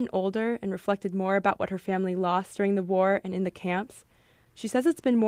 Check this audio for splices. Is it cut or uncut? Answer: uncut